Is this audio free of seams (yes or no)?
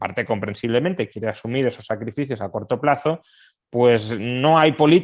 yes